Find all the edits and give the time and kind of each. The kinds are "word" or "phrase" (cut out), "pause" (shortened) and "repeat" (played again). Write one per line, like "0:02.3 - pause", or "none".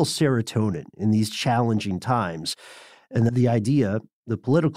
0:03.3 - word